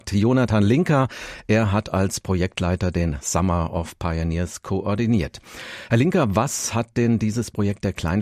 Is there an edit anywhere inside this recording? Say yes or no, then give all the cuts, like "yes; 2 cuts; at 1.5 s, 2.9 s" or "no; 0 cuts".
no; 0 cuts